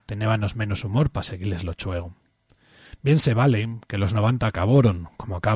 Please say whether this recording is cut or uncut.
uncut